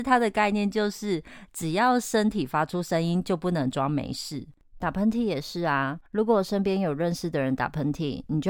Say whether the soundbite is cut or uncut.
uncut